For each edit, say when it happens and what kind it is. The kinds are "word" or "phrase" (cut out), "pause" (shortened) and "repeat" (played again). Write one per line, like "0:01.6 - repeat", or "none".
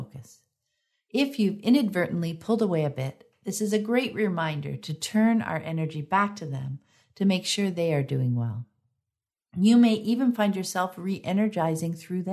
none